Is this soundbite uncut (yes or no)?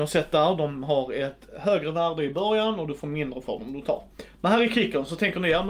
yes